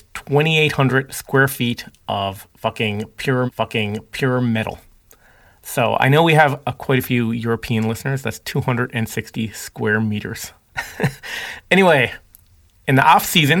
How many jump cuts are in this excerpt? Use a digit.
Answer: 1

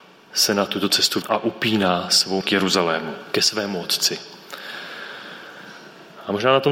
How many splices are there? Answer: 2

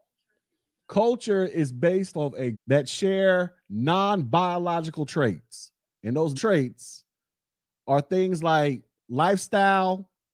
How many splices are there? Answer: 4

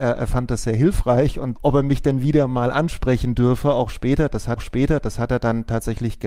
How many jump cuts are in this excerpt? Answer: 2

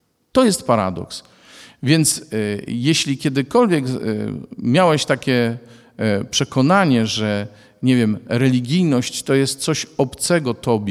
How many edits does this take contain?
0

